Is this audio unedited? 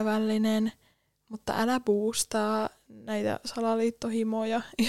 yes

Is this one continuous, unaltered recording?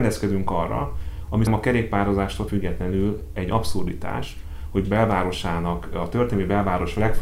no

